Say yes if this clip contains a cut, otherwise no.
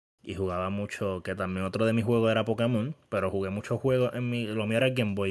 no